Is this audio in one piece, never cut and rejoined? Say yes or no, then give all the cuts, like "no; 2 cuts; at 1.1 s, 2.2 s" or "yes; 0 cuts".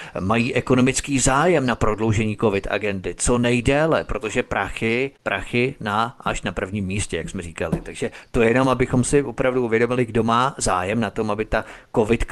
yes; 0 cuts